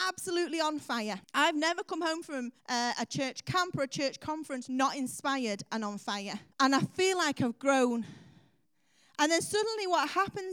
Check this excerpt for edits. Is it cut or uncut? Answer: cut